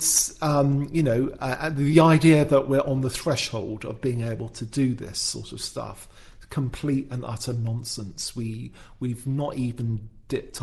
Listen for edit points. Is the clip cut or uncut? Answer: uncut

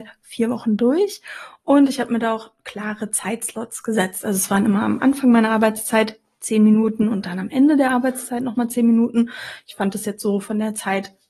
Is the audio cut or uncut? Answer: uncut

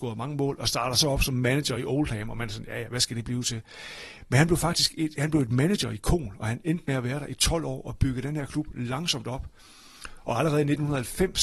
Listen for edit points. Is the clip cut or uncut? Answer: uncut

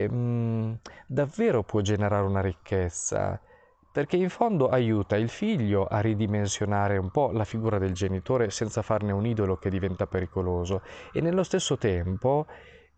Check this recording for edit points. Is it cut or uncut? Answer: uncut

